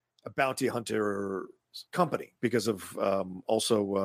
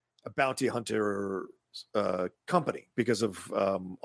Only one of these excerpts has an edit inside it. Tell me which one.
first; 1 cut; at 1.9 s

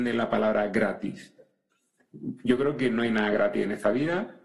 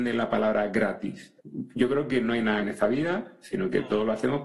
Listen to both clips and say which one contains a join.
second; 2 cuts; at 1.4 s, 2.6 s

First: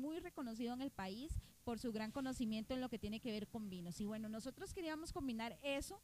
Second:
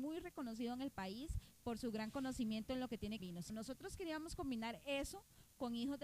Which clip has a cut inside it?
second; 2 cuts; at 3.2 s, 3.5 s

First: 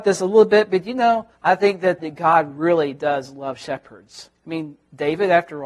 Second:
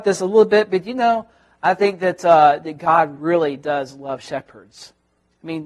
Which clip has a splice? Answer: first; 3 cuts; at 1.3 s, 2.0 s, 4.3 s

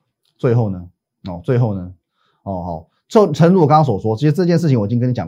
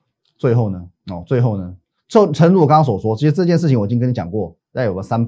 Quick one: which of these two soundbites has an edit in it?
second; 2 cuts; at 1.0 s, 2.0 s

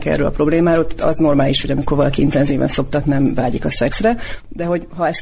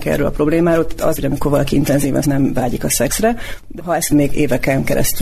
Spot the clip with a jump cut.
second; 4 cuts; at 1.2 s, 2.2 s, 3.8 s, 4.1 s

